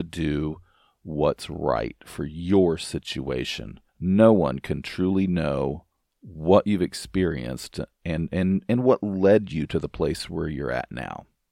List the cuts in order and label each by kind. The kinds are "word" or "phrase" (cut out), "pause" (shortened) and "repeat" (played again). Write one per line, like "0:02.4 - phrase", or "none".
0:03.9 - pause